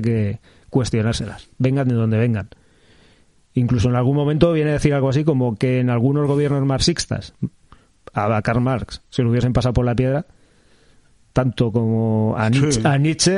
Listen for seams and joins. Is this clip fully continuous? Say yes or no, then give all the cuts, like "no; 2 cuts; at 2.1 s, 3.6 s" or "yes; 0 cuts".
yes; 0 cuts